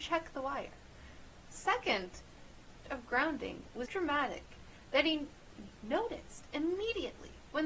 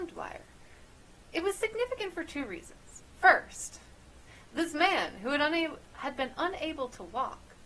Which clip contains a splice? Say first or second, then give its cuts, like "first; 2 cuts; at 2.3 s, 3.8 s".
first; 2 cuts; at 2.8 s, 3.9 s